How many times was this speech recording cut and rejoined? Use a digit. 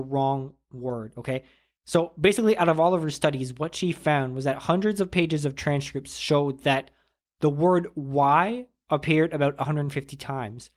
0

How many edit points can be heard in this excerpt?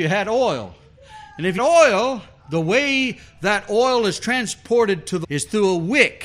2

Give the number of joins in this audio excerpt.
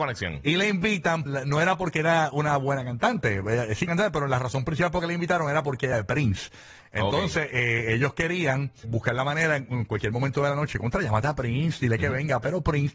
4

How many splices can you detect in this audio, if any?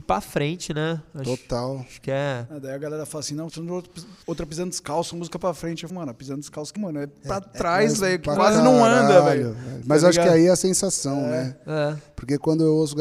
3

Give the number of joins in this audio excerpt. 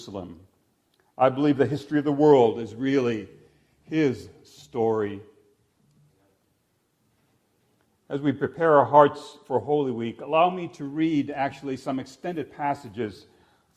0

